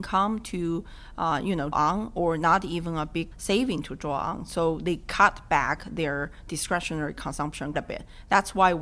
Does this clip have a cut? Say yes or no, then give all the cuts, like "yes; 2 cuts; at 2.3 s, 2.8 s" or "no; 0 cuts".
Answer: yes; 3 cuts; at 1.7 s, 3.3 s, 7.7 s